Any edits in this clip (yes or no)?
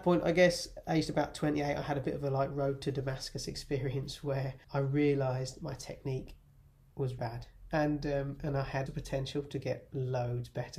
yes